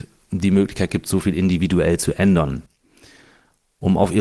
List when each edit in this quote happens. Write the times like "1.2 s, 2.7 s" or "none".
none